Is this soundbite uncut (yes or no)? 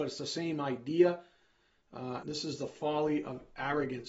no